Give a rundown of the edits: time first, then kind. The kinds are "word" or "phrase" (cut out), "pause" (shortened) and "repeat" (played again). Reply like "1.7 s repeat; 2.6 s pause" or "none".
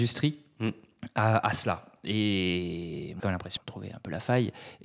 3.2 s word; 3.6 s word